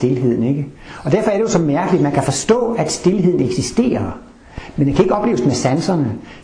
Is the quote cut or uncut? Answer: uncut